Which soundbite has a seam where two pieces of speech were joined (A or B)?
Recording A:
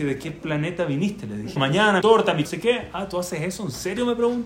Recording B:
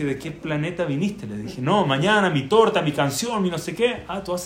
A